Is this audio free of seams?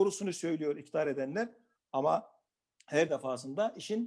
yes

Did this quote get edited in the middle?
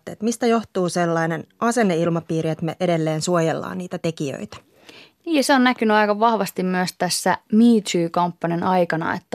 no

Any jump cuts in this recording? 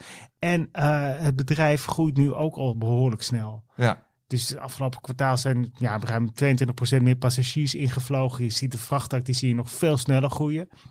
no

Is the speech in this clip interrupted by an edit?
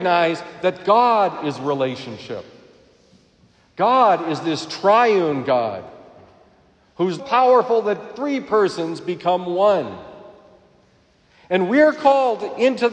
yes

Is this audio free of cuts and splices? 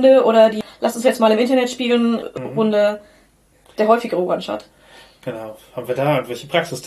yes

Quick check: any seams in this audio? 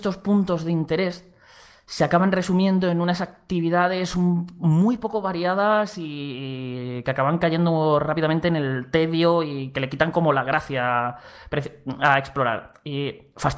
no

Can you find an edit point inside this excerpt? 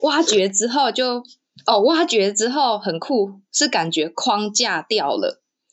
no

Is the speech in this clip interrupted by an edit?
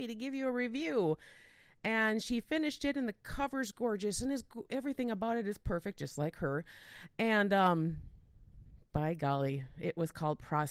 no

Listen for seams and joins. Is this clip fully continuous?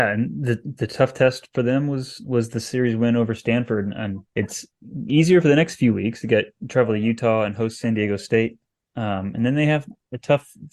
no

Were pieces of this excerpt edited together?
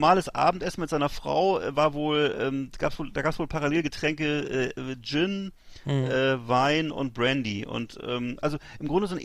no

